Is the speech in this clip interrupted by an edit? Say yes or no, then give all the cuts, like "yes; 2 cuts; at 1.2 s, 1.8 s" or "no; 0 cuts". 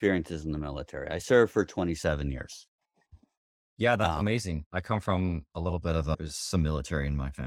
no; 0 cuts